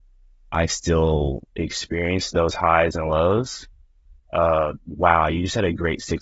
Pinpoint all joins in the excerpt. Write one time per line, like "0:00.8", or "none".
none